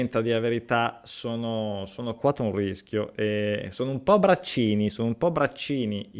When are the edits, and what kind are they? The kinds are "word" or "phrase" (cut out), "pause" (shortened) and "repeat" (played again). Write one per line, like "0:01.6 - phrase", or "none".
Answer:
0:02.2 - phrase